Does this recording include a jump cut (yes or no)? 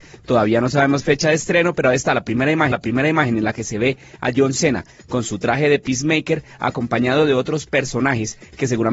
yes